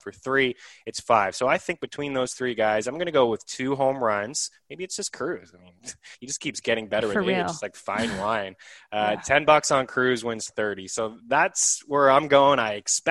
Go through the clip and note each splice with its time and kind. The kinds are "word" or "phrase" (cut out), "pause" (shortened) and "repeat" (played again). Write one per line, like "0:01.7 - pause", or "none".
0:06.1 - pause